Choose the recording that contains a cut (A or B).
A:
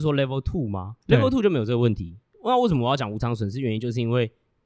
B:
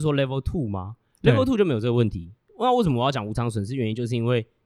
A